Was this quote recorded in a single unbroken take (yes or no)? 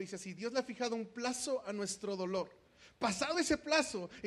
yes